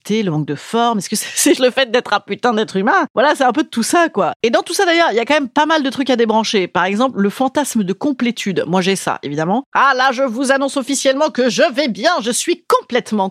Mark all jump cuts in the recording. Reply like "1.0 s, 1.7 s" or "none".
1.6 s